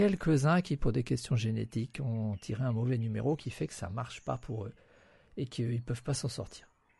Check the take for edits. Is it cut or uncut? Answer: uncut